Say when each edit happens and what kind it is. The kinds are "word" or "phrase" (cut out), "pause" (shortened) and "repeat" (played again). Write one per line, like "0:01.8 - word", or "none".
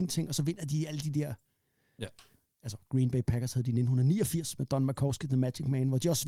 none